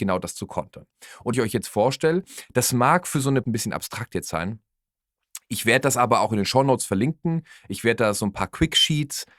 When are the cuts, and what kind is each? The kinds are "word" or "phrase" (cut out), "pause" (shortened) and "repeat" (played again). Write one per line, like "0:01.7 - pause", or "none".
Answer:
0:01.3 - phrase
0:03.4 - phrase